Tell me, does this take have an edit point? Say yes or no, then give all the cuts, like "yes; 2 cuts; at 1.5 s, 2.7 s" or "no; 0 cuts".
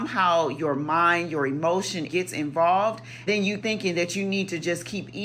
yes; 3 cuts; at 2.1 s, 3.3 s, 3.6 s